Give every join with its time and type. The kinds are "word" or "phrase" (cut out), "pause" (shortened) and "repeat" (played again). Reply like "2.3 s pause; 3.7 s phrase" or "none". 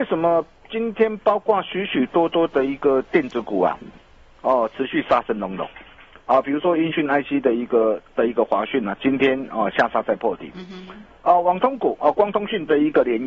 none